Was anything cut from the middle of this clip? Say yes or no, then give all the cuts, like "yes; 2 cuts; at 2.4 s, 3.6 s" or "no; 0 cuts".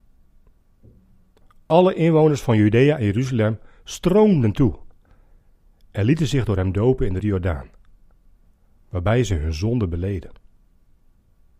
yes; 1 cut; at 7.2 s